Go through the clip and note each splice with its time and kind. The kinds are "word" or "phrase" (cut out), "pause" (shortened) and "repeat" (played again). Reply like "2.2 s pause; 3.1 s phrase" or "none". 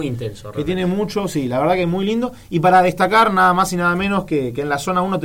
none